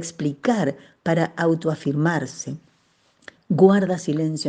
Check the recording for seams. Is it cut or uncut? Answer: uncut